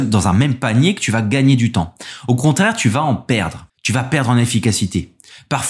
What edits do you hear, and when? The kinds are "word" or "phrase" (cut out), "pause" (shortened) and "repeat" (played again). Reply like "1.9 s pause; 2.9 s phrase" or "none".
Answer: none